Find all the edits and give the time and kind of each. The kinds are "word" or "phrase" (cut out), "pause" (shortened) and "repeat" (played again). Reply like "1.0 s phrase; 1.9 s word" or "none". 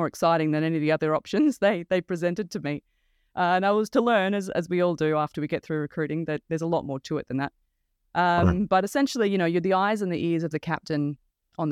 none